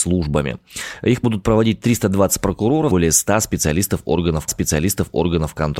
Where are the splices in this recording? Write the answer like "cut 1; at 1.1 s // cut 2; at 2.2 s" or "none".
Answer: cut 1; at 2.9 s // cut 2; at 4.5 s